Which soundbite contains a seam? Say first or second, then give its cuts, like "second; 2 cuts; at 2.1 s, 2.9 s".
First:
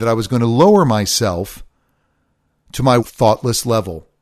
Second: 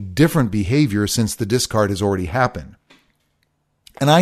first; 1 cut; at 3.0 s